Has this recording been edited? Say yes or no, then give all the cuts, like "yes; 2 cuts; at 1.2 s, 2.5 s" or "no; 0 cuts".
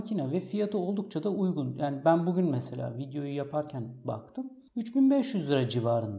yes; 1 cut; at 4.7 s